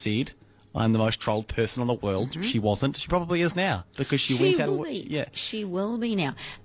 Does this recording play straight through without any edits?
no; 1 cut; at 4.7 s

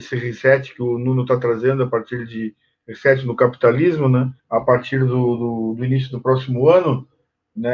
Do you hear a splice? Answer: yes; 1 cut; at 4.4 s

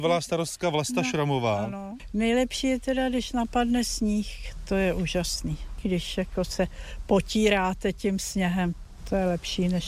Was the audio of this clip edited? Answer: no; 0 cuts

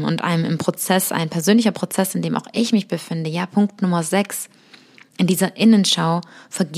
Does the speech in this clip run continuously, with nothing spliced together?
yes; 0 cuts

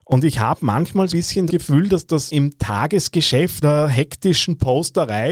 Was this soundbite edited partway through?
yes; 4 cuts; at 1.1 s, 1.5 s, 2.3 s, 3.6 s

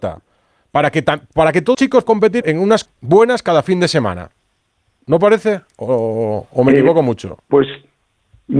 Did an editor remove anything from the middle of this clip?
yes; 4 cuts; at 1.7 s, 2.1 s, 2.4 s, 2.9 s

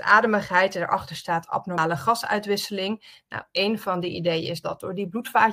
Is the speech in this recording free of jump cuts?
no; 1 cut; at 4.6 s

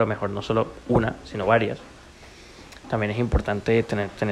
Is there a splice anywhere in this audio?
no; 0 cuts

